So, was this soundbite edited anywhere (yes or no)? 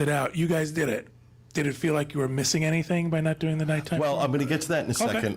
no